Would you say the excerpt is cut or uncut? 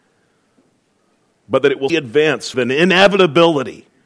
cut